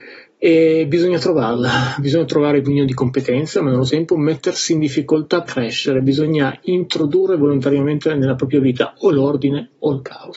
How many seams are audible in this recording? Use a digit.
3